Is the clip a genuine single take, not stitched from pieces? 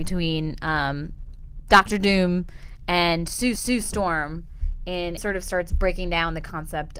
no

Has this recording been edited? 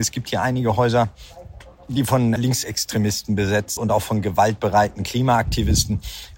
yes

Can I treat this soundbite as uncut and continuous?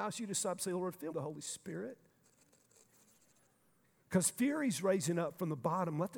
no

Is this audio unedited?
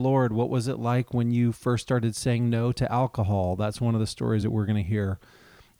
yes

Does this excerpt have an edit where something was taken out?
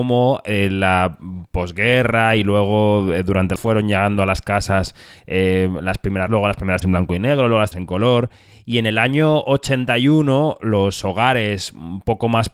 yes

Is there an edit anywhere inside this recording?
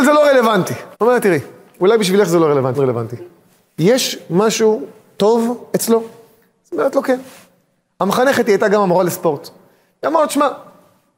yes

